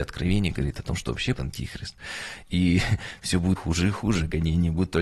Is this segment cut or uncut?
cut